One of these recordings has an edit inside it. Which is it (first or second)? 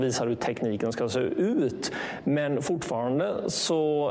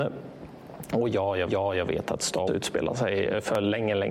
second